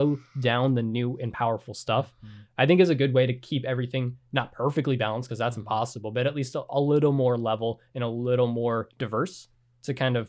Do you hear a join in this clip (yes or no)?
yes